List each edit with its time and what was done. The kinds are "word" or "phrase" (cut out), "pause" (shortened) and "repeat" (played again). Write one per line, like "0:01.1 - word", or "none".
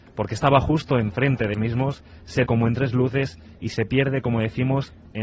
0:01.5 - word
0:02.5 - word